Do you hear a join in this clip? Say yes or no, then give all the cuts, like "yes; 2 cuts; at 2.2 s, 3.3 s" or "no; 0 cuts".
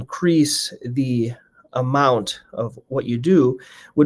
no; 0 cuts